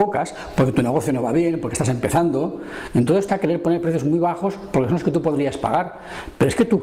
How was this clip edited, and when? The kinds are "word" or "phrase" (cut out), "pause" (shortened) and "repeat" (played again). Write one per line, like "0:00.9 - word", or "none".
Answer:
0:03.3 - phrase